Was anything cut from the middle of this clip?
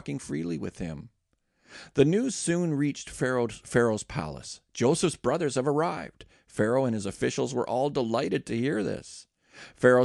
no; 0 cuts

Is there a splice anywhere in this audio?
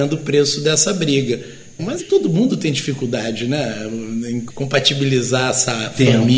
yes; 1 cut; at 2.0 s

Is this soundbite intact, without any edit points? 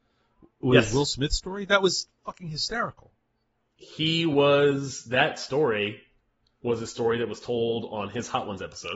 yes; 0 cuts

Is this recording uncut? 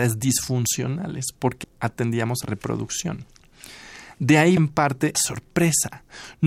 no; 4 cuts; at 1.6 s, 2.4 s, 4.6 s, 5.1 s

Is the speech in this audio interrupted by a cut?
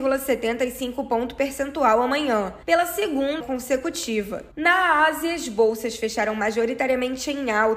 yes; 3 cuts; at 2.6 s, 3.4 s, 4.5 s

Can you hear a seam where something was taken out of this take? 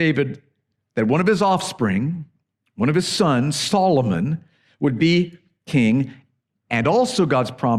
no; 0 cuts

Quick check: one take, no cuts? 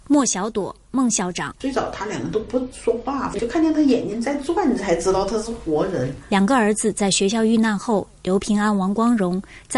yes; 0 cuts

